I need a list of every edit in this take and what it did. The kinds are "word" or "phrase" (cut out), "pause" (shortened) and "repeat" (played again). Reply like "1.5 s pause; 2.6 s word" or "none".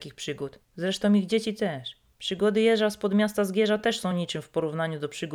none